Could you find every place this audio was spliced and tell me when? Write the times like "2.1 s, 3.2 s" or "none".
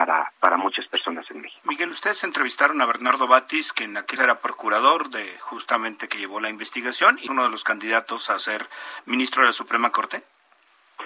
4.2 s, 7.3 s